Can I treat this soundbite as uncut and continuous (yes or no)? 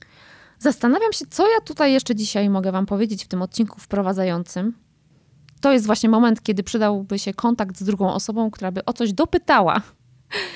yes